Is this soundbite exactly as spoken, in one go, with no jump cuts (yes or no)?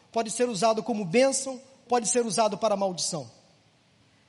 no